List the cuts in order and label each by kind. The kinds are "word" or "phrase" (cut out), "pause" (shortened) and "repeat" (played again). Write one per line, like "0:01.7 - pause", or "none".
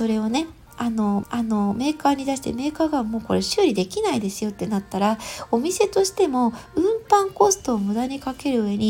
0:01.2 - repeat